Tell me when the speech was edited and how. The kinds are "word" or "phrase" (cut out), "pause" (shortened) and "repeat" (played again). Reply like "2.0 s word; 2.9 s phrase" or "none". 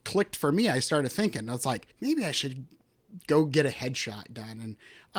1.9 s pause